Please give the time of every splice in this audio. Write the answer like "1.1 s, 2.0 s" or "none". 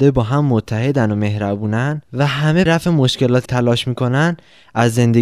2.1 s, 2.7 s, 3.5 s